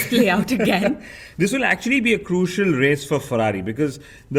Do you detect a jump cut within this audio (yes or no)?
no